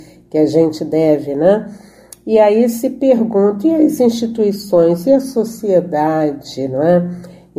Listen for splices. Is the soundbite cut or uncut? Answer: uncut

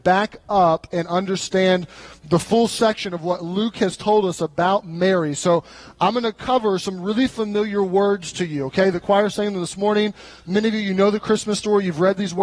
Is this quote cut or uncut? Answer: uncut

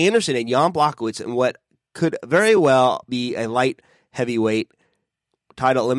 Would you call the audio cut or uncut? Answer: uncut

